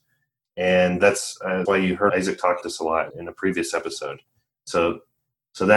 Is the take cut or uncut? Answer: cut